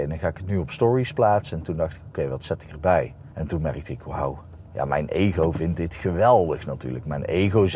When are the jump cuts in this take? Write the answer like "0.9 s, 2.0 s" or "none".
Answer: 3.3 s, 4.7 s